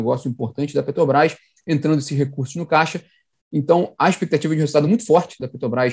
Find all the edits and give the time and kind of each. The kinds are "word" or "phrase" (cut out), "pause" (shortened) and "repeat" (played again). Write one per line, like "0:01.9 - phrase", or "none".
none